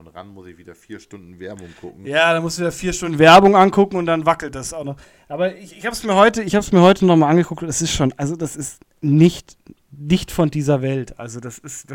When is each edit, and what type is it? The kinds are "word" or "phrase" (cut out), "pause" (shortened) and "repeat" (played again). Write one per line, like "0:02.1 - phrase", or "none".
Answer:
none